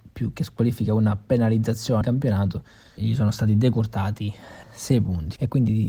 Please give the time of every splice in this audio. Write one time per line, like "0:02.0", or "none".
0:02.0
0:03.0
0:04.6